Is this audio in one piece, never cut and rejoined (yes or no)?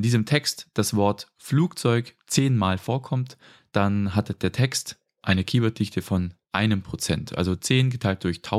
yes